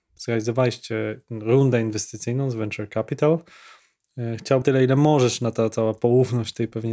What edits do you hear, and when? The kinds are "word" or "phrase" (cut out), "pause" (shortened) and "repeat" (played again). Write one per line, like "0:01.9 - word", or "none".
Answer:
0:04.6 - word